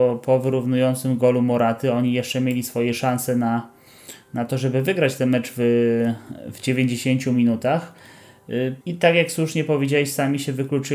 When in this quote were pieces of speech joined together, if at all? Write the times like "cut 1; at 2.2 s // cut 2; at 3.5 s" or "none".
cut 1; at 8.8 s